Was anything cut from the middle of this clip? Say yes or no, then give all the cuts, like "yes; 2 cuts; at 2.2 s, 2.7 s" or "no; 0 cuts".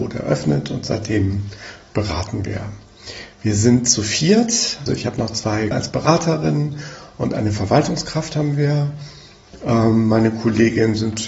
yes; 2 cuts; at 4.9 s, 5.7 s